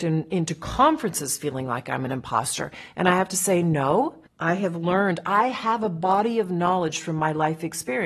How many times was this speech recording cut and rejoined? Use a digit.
1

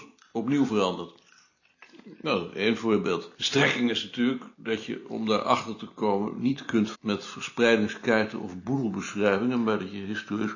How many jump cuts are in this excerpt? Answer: 3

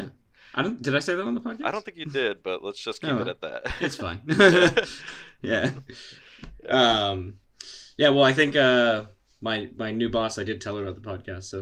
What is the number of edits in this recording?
0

